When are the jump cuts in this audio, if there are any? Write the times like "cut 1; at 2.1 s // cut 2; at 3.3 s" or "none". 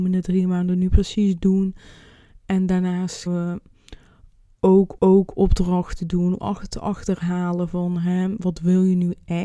cut 1; at 3.3 s // cut 2; at 5.0 s // cut 3; at 6.4 s